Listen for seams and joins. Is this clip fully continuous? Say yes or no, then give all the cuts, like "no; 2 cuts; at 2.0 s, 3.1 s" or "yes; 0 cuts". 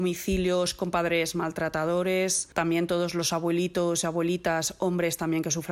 yes; 0 cuts